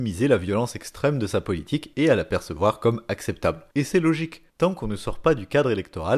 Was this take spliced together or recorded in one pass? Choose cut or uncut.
cut